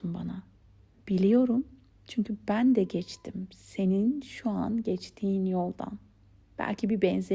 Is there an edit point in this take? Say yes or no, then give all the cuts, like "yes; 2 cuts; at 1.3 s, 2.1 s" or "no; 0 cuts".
no; 0 cuts